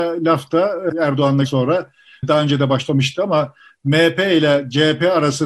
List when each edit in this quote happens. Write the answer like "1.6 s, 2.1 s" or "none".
0.9 s, 1.4 s